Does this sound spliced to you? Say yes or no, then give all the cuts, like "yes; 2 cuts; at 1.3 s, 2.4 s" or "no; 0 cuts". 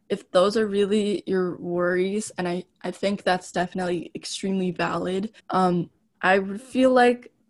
yes; 1 cut; at 5.4 s